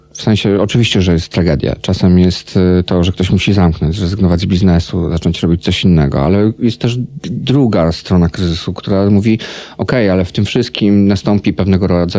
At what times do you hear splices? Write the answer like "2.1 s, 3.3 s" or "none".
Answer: none